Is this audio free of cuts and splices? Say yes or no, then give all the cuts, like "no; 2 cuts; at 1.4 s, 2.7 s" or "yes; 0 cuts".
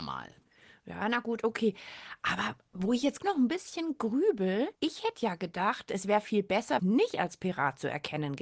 no; 3 cuts; at 3.2 s, 4.7 s, 6.8 s